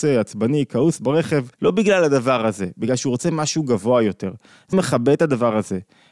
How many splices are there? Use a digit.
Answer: 2